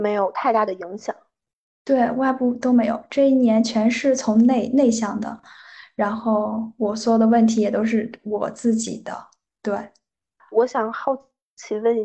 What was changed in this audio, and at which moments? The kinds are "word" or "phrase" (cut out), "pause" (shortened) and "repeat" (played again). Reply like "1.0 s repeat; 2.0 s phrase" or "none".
10.5 s word